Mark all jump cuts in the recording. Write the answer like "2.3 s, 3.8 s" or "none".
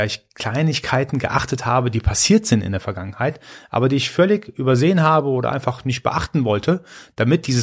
none